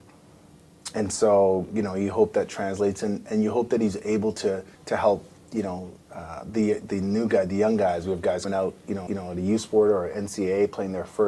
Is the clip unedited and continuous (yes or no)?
no